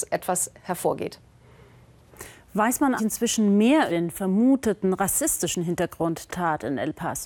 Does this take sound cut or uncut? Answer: cut